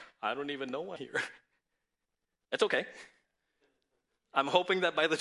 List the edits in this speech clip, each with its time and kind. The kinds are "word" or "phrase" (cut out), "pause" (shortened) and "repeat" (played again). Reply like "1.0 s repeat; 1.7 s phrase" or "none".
1.0 s word